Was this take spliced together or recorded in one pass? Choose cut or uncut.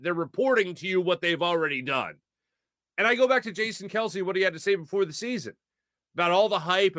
uncut